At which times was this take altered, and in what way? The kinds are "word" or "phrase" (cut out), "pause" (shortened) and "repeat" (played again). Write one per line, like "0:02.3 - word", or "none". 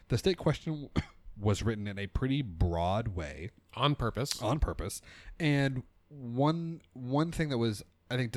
none